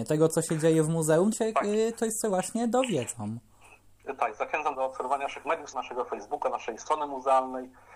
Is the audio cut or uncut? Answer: cut